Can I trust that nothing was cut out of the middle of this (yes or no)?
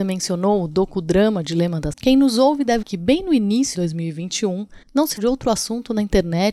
no